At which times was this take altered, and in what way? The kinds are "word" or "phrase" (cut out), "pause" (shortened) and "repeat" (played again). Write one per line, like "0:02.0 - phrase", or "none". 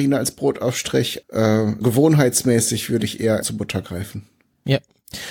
0:01.2 - word
0:01.8 - word
0:03.4 - word